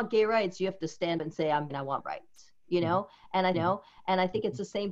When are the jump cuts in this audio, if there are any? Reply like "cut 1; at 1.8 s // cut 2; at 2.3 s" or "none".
cut 1; at 1.2 s // cut 2; at 1.7 s // cut 3; at 2.0 s // cut 4; at 3.5 s